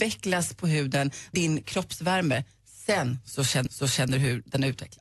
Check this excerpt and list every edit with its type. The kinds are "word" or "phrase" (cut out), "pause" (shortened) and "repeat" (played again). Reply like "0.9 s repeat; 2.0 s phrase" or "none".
1.3 s word; 3.7 s repeat